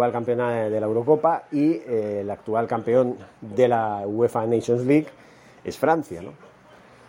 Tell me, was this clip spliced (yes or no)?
no